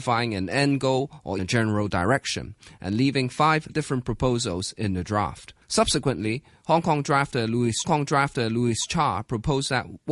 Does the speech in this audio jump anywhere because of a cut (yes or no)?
yes